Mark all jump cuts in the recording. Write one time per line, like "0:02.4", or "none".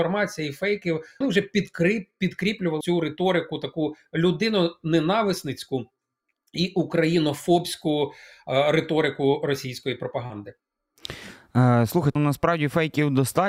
0:01.2
0:02.8
0:12.2